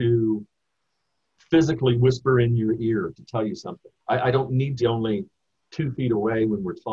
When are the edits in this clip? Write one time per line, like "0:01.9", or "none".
0:04.0
0:04.8